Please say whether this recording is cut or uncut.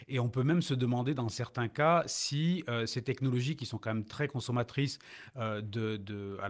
uncut